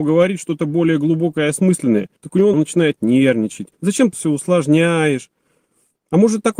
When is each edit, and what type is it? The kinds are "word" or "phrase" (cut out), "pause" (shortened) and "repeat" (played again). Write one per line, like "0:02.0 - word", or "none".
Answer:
0:02.2 - pause
0:02.5 - phrase
0:03.7 - pause
0:04.1 - word